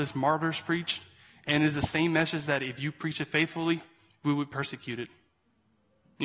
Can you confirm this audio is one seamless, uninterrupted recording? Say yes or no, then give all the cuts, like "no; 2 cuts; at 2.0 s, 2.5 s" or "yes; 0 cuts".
yes; 0 cuts